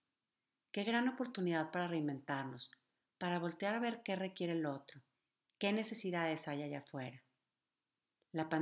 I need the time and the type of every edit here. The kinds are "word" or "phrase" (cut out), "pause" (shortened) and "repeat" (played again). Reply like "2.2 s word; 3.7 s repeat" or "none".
none